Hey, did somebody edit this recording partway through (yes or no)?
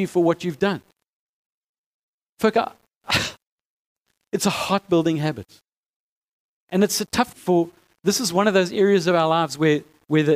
yes